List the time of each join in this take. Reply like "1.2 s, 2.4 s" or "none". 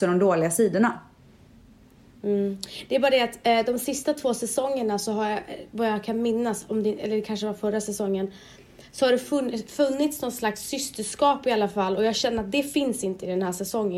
none